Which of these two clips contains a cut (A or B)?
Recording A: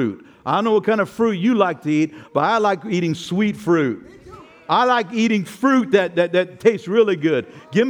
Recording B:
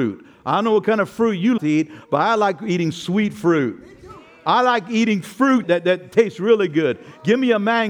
B